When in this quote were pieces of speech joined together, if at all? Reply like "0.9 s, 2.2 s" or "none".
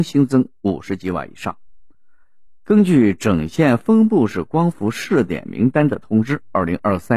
none